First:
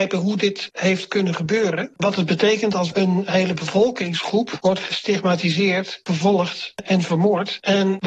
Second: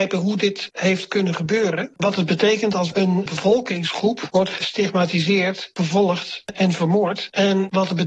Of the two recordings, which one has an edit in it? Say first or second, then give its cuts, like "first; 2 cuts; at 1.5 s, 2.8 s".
second; 1 cut; at 3.3 s